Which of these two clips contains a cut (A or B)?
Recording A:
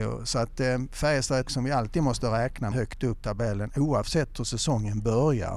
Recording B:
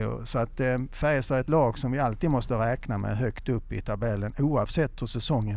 A